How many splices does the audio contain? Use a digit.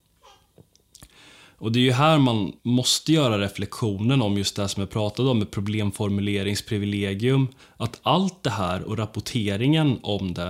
2